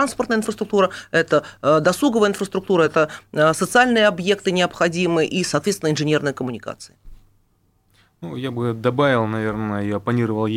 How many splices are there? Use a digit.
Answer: 0